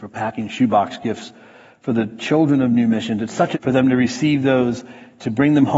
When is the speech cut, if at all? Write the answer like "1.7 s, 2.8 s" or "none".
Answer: 3.5 s